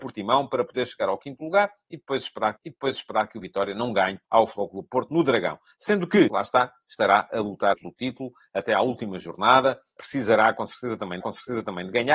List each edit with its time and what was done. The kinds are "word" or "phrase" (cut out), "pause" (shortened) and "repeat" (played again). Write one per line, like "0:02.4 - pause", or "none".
0:02.6 - repeat
0:04.3 - pause
0:06.3 - phrase
0:07.7 - word
0:10.0 - word
0:11.2 - repeat